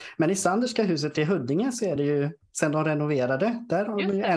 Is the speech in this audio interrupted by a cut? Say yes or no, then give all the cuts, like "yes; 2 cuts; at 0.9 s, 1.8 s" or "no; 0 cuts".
no; 0 cuts